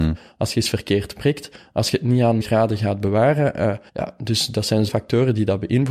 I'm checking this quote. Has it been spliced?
yes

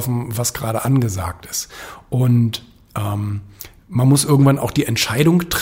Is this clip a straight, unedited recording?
yes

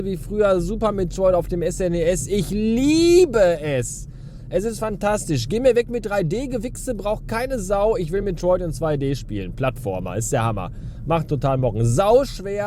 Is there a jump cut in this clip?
no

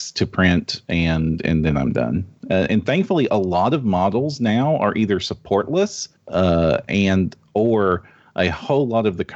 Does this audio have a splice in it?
yes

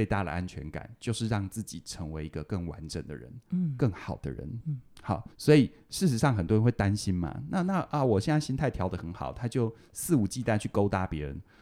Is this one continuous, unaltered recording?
no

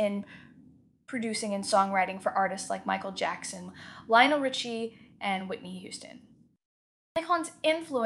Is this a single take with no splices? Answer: yes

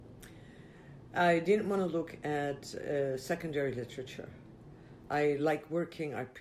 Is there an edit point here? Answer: no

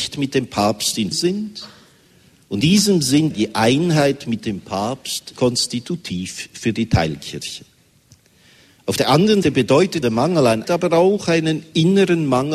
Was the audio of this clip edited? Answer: yes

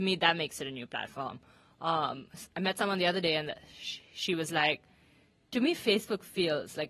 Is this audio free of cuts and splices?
yes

